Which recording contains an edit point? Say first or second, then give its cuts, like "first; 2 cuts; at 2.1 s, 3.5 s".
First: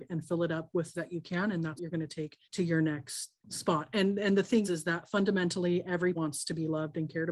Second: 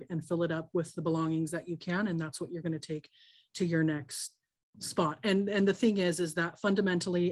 first; 6 cuts; at 0.9 s, 1.8 s, 2.4 s, 3.4 s, 4.6 s, 6.2 s